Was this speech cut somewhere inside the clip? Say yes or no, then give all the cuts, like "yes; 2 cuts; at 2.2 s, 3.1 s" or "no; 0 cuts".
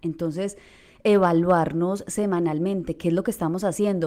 no; 0 cuts